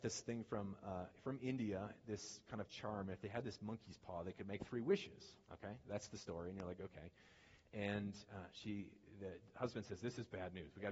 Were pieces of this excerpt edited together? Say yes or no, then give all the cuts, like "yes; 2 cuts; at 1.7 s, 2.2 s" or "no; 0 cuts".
yes; 1 cut; at 5.4 s